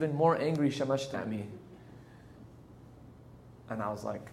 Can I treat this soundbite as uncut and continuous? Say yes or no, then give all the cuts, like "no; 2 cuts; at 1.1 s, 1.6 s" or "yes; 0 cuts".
no; 1 cut; at 1.1 s